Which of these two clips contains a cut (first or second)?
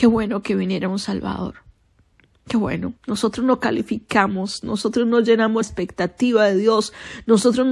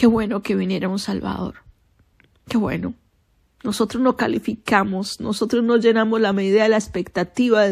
first